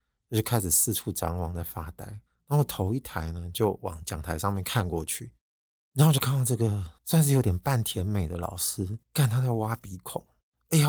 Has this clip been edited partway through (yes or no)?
yes